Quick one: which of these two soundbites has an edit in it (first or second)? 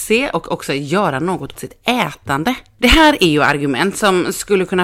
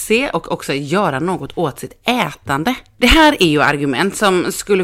first